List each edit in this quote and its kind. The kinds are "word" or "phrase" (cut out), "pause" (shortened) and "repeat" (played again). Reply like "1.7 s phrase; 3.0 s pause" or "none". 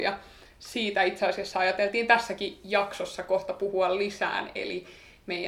none